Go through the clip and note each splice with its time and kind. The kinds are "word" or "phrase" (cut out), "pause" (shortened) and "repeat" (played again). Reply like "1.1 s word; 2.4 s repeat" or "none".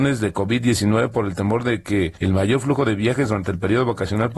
2.2 s pause